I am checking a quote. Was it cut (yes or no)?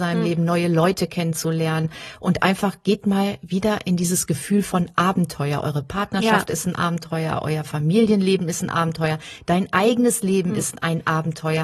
no